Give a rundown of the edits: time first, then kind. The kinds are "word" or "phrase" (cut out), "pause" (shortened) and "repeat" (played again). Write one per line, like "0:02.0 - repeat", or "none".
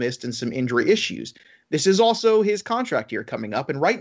none